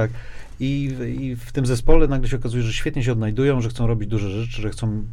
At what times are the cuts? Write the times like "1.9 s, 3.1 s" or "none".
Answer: none